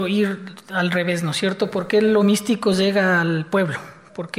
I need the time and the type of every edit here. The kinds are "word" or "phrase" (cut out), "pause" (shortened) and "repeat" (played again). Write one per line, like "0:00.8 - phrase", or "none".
none